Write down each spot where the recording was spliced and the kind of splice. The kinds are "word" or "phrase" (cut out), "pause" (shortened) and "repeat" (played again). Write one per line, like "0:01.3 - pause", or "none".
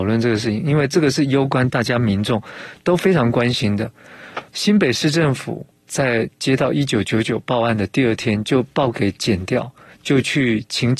0:04.5 - pause